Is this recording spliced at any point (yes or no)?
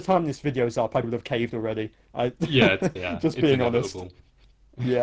yes